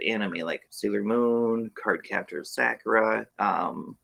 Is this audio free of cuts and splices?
yes; 0 cuts

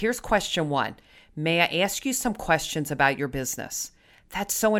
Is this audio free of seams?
yes; 0 cuts

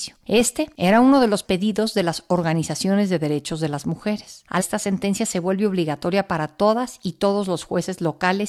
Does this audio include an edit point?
yes; 2 cuts; at 1.4 s, 4.6 s

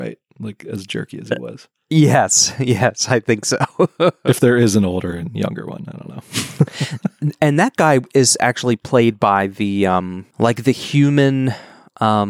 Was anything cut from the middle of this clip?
no; 0 cuts

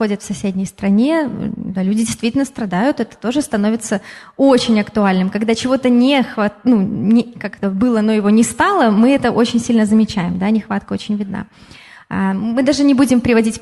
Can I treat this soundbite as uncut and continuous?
yes; 0 cuts

